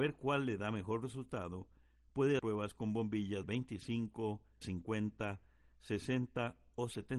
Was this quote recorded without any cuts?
no; 3 cuts; at 2.4 s, 3.4 s, 4.6 s

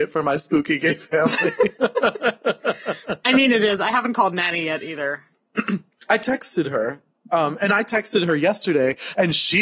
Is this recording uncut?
yes; 0 cuts

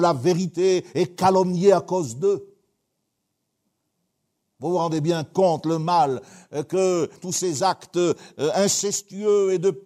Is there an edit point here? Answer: no; 0 cuts

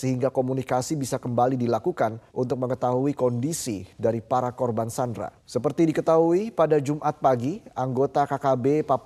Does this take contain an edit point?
yes; 2 cuts; at 2.3 s, 5.4 s

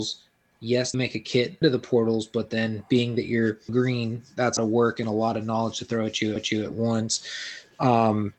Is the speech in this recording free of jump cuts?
no; 5 cuts; at 0.9 s, 1.6 s, 3.7 s, 4.6 s, 6.4 s

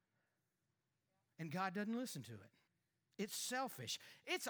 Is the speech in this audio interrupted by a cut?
yes; 1 cut; at 2.7 s

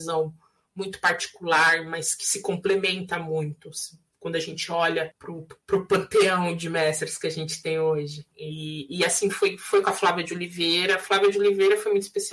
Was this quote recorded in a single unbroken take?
yes; 0 cuts

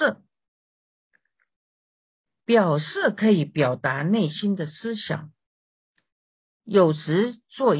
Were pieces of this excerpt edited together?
no; 0 cuts

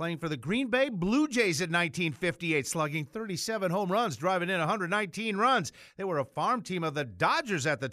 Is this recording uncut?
yes; 0 cuts

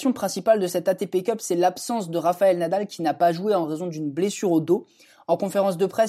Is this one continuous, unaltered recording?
yes; 0 cuts

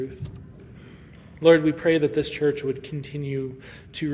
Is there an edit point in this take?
no; 0 cuts

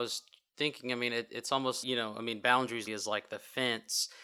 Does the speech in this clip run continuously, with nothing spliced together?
no; 2 cuts; at 1.8 s, 2.9 s

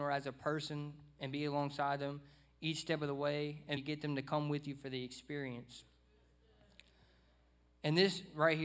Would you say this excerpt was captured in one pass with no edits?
no; 1 cut; at 3.8 s

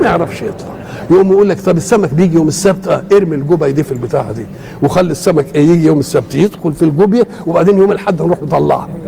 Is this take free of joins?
yes; 0 cuts

